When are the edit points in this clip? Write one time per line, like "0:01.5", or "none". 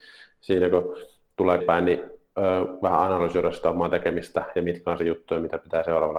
0:01.6
0:05.0

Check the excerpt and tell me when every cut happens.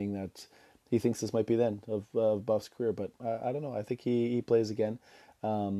none

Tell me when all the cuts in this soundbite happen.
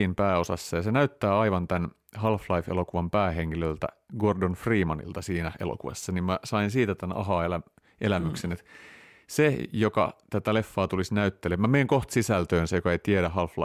none

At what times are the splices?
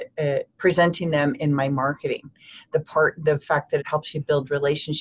0:03.8

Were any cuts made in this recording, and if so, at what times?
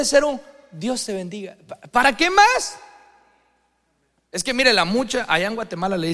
none

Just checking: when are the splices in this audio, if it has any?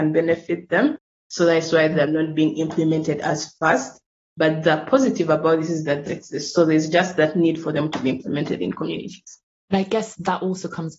0:06.1
0:09.5

